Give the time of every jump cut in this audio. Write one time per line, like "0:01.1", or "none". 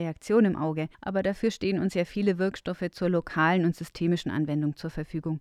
0:00.9